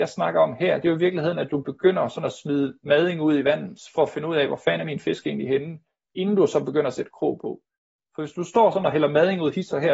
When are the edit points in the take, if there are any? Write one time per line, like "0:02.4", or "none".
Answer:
none